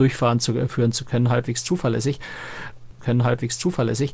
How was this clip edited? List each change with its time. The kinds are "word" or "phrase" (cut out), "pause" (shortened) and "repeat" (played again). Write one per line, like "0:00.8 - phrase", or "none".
0:03.0 - repeat